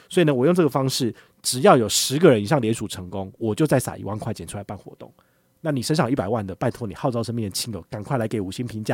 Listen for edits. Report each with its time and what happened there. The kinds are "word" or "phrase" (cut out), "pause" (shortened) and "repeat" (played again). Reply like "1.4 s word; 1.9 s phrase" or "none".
none